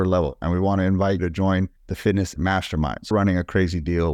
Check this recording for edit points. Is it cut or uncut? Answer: cut